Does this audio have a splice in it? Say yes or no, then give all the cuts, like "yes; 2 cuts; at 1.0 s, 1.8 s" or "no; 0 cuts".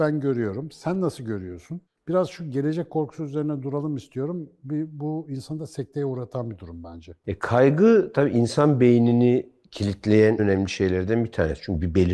yes; 2 cuts; at 1.9 s, 10.4 s